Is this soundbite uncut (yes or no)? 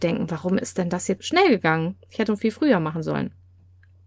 no